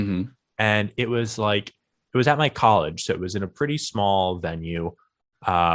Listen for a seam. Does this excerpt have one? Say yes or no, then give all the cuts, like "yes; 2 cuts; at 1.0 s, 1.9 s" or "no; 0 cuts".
no; 0 cuts